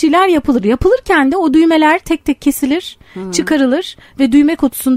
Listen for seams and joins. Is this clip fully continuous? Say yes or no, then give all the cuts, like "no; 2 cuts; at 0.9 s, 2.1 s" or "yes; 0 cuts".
yes; 0 cuts